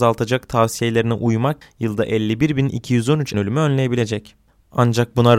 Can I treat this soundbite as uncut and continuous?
no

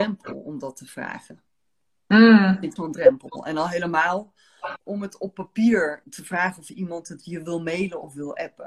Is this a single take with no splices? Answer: no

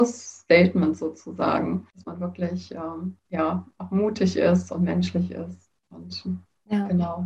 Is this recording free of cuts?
no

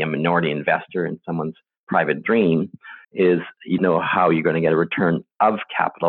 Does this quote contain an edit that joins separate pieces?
yes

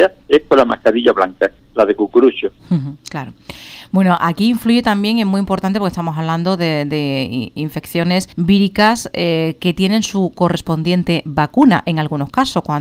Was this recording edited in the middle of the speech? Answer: yes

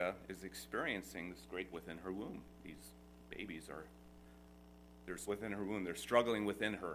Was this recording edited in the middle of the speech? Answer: yes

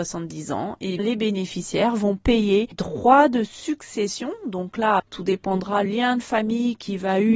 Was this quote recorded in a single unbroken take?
no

